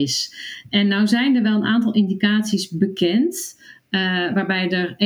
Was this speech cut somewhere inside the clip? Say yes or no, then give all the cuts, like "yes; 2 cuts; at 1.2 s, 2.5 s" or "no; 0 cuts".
no; 0 cuts